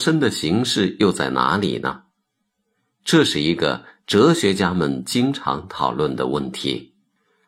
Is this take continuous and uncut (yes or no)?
yes